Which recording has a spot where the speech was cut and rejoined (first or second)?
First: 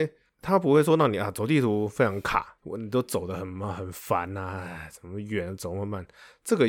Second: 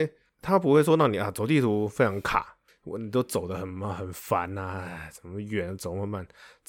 first